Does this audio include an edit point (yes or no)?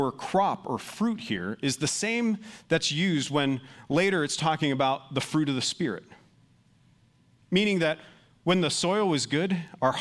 no